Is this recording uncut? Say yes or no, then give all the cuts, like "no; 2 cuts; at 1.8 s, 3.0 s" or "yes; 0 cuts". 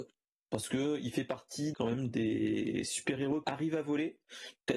no; 2 cuts; at 1.7 s, 3.4 s